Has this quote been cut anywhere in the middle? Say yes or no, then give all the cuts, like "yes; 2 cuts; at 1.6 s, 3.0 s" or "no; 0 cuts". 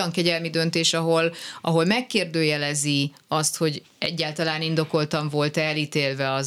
no; 0 cuts